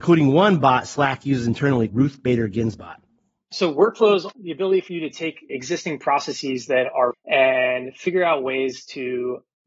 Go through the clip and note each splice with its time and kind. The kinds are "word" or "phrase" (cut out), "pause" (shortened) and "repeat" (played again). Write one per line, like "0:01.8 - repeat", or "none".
0:01.9 - word
0:04.3 - word
0:05.5 - word
0:07.1 - word